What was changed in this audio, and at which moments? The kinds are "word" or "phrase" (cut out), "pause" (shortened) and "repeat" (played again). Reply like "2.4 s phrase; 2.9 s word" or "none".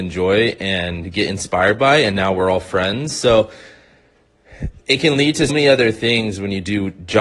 5.5 s word